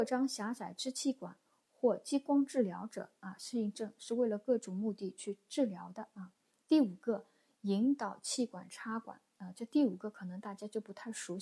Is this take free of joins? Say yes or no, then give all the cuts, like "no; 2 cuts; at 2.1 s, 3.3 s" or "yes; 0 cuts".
yes; 0 cuts